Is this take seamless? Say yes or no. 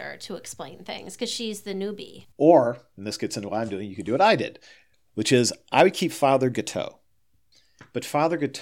no